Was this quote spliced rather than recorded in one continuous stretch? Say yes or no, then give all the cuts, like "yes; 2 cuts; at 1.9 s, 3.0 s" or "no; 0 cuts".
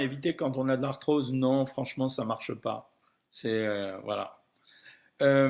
no; 0 cuts